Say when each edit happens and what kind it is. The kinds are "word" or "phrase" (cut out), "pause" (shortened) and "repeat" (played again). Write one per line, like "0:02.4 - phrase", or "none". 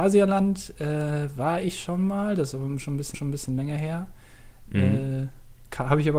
0:03.1 - repeat